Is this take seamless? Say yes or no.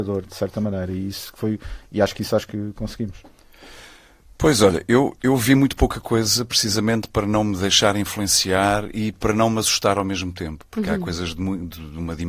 yes